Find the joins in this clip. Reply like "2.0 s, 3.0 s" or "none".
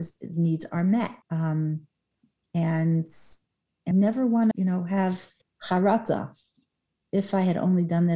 1.2 s, 3.9 s, 4.5 s, 5.4 s